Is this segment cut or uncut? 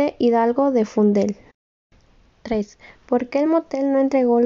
uncut